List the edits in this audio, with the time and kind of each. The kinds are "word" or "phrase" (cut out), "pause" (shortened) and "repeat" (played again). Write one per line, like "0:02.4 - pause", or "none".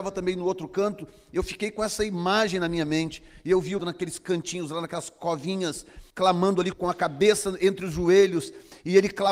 0:03.8 - phrase
0:06.1 - pause
0:06.7 - word